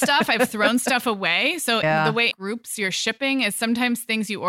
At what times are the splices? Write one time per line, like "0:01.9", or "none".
0:01.8
0:02.3